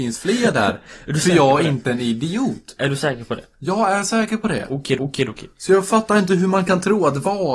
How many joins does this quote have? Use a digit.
1